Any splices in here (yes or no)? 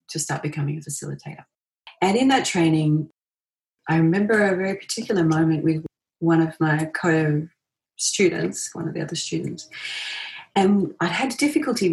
no